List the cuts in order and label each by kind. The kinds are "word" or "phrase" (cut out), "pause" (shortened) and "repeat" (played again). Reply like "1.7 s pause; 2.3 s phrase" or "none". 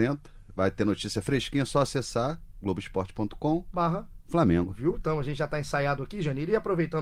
none